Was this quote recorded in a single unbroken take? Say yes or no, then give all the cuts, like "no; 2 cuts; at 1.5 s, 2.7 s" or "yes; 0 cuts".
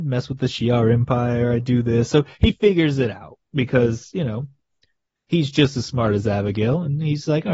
yes; 0 cuts